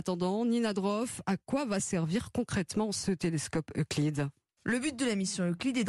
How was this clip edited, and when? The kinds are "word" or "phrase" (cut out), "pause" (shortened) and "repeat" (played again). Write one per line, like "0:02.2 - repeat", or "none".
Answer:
none